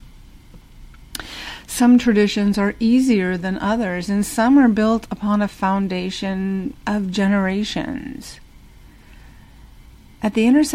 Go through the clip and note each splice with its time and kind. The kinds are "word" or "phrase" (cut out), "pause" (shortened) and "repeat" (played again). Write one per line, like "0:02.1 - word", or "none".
none